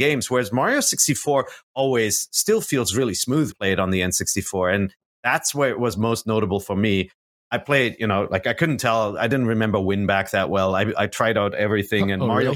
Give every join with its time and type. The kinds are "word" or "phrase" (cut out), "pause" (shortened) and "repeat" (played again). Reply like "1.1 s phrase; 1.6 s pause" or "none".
3.5 s phrase